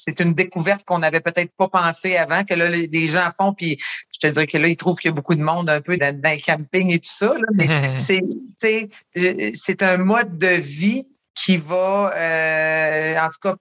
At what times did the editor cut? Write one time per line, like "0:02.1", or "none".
0:06.0

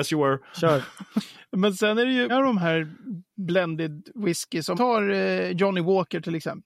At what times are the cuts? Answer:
0:02.3
0:04.7

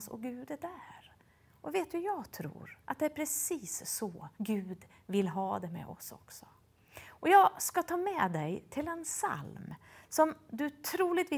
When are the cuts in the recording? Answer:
0:02.8
0:04.3

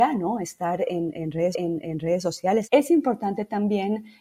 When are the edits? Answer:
0:01.5

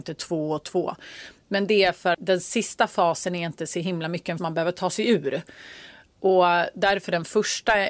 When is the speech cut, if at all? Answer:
0:02.1
0:04.4

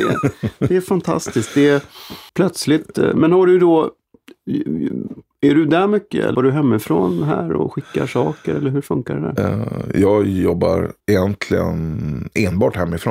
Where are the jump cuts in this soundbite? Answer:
0:02.3
0:06.3
0:11.0

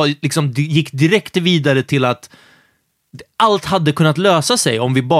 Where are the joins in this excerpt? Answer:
none

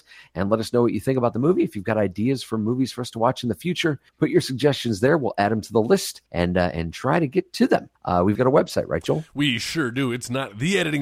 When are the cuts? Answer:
0:04.1
0:06.3
0:08.0
0:08.3

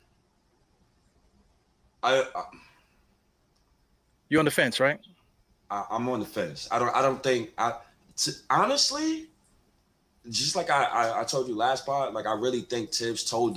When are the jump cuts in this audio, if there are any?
none

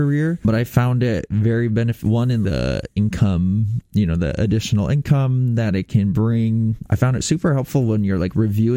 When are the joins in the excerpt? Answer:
none

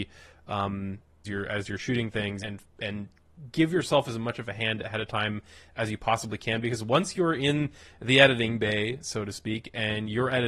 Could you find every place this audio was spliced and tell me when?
0:01.2
0:02.4

